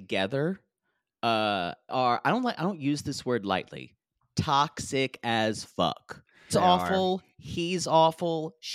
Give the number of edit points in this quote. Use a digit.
2